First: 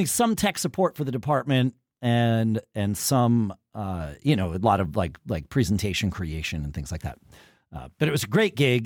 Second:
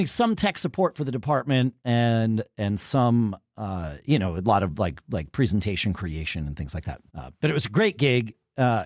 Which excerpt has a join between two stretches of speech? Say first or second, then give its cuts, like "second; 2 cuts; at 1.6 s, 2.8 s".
second; 2 cuts; at 1.8 s, 7.1 s